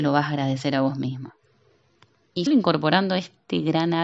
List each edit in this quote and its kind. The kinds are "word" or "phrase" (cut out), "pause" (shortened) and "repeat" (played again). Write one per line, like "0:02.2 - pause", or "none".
0:02.5 - word